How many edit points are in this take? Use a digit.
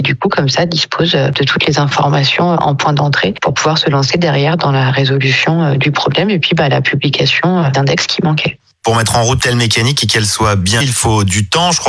3